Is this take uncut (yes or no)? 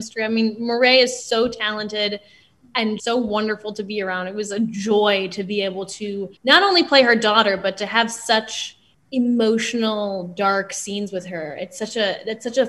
no